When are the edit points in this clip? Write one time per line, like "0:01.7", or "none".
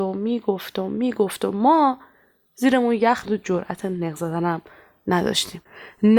0:03.2